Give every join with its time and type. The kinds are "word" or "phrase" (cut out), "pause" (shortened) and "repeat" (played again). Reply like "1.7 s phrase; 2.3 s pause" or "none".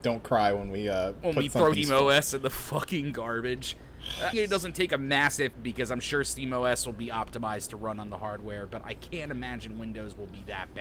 1.7 s word; 4.3 s word; 5.5 s phrase